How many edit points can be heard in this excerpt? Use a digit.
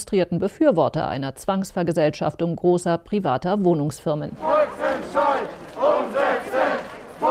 0